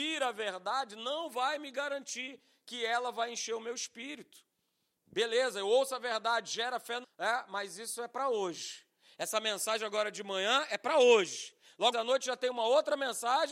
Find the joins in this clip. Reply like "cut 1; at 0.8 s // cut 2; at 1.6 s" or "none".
cut 1; at 7.0 s // cut 2; at 11.9 s